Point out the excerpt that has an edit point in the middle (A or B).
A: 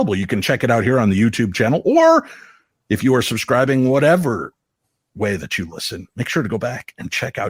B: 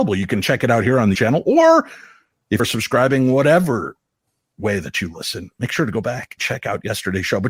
B